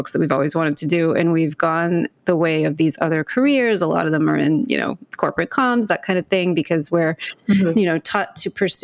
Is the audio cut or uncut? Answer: uncut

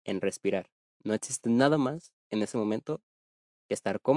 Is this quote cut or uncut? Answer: cut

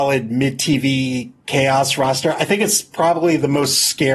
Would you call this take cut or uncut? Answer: uncut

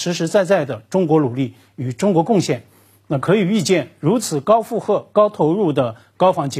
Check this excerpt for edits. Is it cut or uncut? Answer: uncut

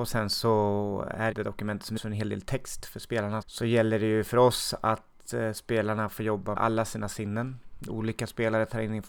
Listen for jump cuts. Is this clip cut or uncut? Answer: cut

